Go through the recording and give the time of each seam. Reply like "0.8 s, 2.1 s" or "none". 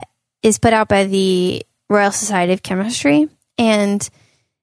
none